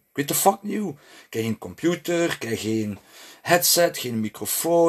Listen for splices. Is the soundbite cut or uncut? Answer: uncut